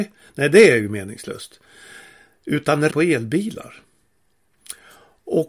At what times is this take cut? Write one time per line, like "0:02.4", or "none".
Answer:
0:02.9